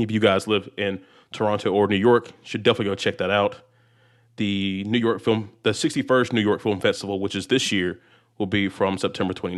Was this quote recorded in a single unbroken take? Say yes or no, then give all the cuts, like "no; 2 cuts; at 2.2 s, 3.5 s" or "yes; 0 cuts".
yes; 0 cuts